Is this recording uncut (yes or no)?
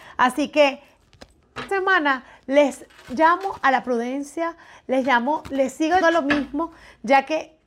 no